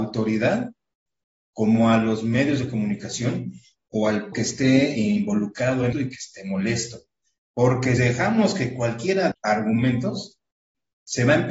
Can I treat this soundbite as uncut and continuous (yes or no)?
no